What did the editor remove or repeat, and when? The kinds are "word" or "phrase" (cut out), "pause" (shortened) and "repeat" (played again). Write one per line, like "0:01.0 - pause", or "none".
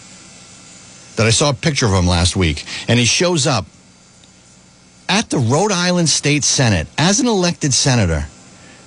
none